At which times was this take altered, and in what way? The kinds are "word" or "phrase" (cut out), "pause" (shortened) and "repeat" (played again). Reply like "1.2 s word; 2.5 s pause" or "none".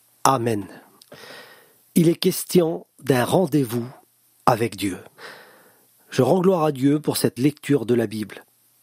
7.4 s word